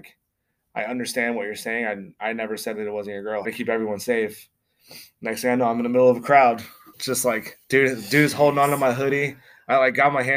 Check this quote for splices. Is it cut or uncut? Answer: cut